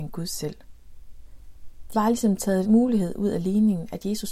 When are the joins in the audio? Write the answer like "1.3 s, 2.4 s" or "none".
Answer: 1.9 s, 2.6 s